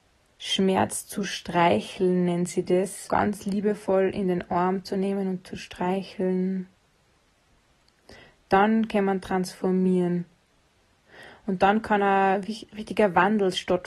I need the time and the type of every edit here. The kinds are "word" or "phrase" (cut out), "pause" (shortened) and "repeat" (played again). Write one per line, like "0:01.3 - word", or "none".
0:03.1 - word